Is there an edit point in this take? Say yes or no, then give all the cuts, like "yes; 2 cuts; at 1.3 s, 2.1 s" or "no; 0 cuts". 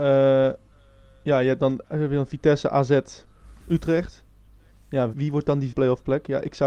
yes; 3 cuts; at 1.8 s, 5.1 s, 5.7 s